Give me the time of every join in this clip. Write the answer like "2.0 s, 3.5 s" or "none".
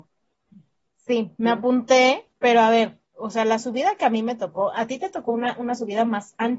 1.3 s